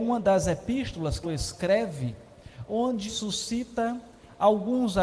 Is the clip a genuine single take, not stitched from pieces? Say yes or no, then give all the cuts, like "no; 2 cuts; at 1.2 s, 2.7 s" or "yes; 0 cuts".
no; 2 cuts; at 1.2 s, 3.1 s